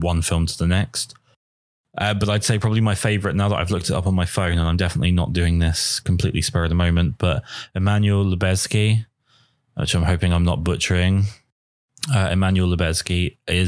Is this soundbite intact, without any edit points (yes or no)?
yes